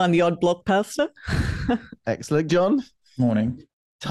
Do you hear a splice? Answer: yes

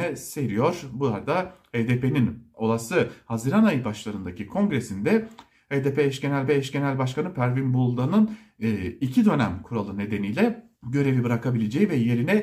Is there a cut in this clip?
yes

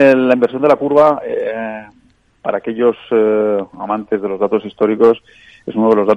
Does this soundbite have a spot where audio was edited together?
no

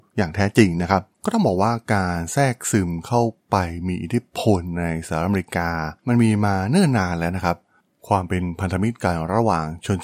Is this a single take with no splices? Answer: yes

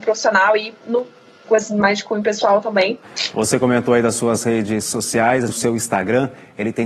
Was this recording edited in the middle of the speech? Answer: yes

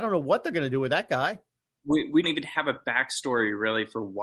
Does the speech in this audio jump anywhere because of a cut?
yes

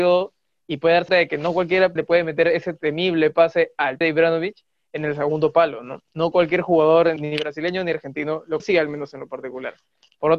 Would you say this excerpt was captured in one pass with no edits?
no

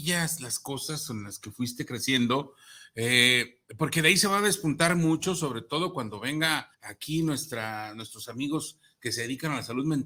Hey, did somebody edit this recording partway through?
yes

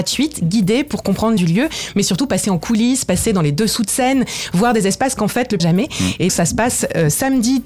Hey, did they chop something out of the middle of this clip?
yes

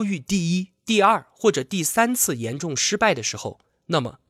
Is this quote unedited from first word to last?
yes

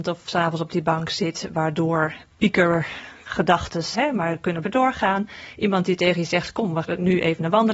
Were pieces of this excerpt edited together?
yes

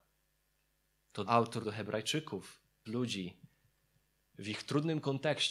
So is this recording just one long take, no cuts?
no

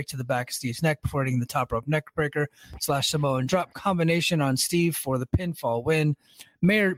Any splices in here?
no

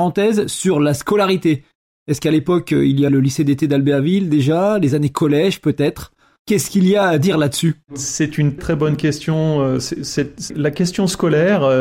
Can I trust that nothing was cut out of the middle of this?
no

